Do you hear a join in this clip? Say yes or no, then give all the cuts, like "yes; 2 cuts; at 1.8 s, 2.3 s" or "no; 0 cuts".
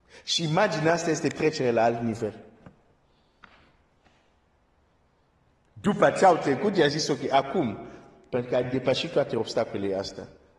no; 0 cuts